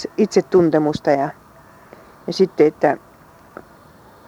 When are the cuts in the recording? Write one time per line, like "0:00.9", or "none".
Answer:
none